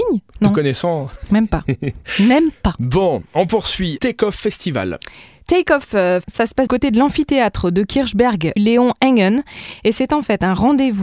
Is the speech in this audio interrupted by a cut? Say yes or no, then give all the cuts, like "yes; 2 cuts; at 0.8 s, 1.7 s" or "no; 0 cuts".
yes; 4 cuts; at 4.0 s, 6.2 s, 6.7 s, 8.6 s